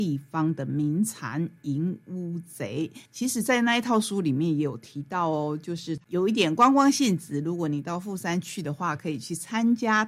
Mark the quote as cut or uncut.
cut